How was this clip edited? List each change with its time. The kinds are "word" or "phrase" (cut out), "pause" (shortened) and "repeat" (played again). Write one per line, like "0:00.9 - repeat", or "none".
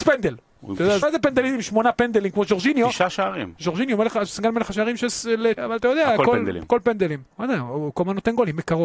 0:01.0 - word
0:05.6 - word
0:07.3 - pause